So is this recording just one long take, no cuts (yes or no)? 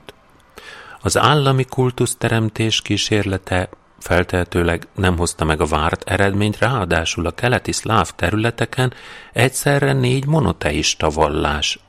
yes